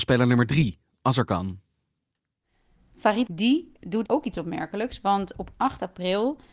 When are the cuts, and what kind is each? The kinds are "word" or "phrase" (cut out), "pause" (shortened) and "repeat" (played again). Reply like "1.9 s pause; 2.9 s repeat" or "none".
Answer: 3.3 s word; 4.0 s word